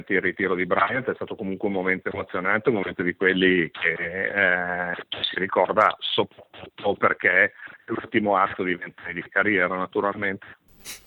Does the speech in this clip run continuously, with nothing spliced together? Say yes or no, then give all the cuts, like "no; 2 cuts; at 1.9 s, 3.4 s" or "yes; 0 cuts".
no; 1 cut; at 5.3 s